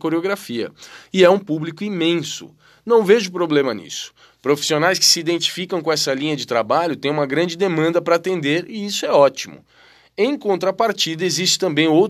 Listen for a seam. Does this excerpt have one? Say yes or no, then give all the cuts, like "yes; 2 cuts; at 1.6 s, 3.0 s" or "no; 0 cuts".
no; 0 cuts